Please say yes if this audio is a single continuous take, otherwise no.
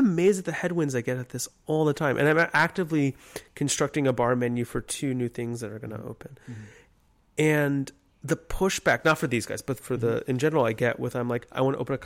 yes